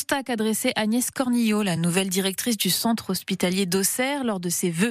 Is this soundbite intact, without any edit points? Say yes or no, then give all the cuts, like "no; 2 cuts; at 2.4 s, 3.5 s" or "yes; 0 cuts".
yes; 0 cuts